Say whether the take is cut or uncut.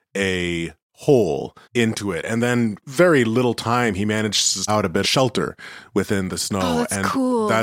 cut